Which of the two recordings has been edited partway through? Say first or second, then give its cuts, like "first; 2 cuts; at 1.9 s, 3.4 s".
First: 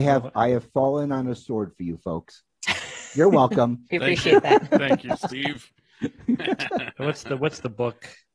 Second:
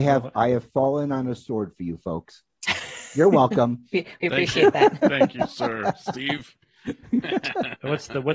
first; 2 cuts; at 3.9 s, 5.2 s